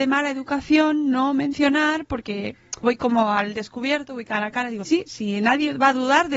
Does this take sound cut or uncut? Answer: cut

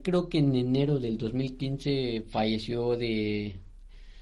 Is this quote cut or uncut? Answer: uncut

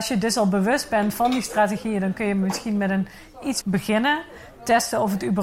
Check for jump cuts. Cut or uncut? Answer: cut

